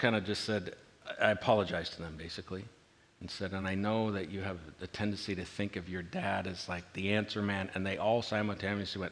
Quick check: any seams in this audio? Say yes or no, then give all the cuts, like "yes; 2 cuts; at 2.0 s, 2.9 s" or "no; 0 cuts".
no; 0 cuts